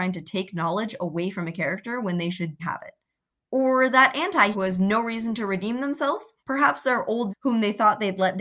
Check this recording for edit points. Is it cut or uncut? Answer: cut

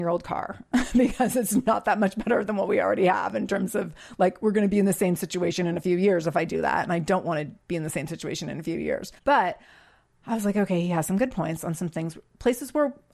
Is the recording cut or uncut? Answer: cut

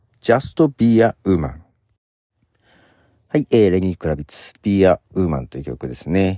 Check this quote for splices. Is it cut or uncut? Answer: cut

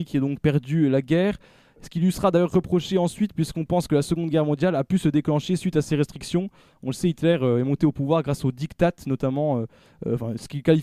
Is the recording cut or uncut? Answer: uncut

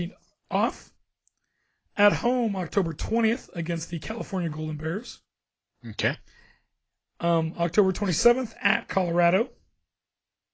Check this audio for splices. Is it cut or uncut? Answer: uncut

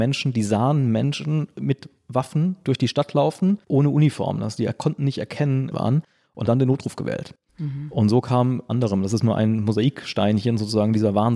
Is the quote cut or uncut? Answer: cut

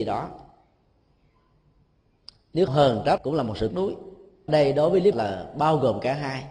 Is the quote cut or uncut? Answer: cut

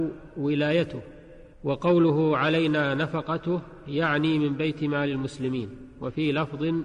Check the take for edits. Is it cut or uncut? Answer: cut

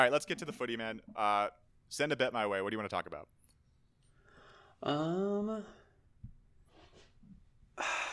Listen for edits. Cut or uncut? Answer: uncut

